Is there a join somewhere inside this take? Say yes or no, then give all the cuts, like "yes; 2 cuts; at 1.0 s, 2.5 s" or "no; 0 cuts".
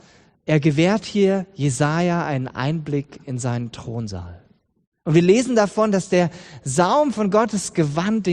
no; 0 cuts